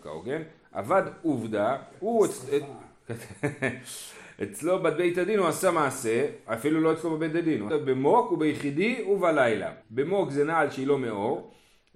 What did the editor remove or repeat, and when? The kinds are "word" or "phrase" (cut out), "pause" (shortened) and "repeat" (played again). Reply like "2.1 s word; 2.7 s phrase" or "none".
7.7 s phrase; 9.8 s pause